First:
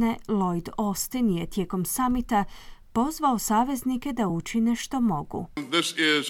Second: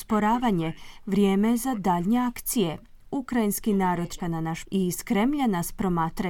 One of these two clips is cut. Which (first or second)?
second